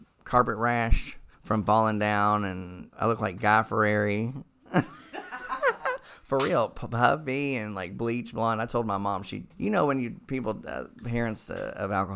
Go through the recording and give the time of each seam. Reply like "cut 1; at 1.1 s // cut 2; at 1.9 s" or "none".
cut 1; at 1.3 s // cut 2; at 2.9 s // cut 3; at 9.5 s